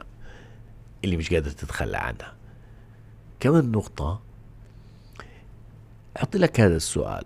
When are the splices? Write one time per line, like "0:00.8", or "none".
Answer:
none